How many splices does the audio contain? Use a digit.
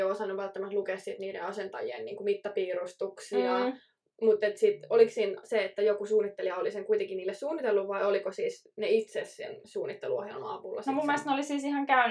0